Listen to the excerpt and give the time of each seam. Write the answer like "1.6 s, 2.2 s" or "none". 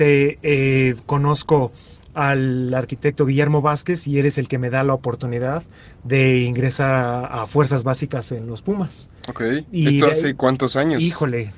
none